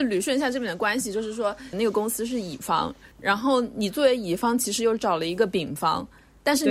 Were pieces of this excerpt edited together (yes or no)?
yes